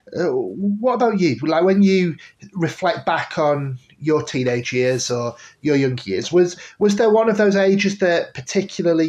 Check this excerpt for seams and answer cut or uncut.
uncut